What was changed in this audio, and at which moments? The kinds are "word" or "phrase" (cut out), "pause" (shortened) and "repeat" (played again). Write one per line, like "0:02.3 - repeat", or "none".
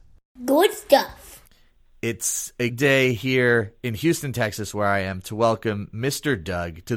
0:02.7 - word